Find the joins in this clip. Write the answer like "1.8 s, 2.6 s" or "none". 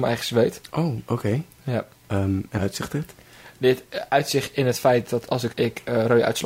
2.6 s, 5.5 s